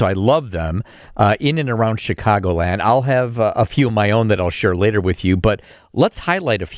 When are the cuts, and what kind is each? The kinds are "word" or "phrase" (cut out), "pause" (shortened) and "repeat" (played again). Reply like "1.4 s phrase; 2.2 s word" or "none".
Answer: none